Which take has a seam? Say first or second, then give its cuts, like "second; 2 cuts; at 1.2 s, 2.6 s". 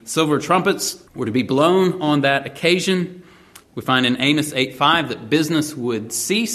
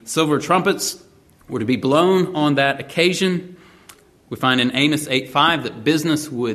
first; 2 cuts; at 1.1 s, 3.6 s